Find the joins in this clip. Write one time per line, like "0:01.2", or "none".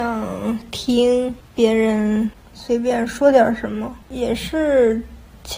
0:04.0